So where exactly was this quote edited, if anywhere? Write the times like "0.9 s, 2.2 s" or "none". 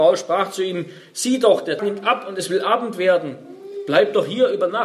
1.8 s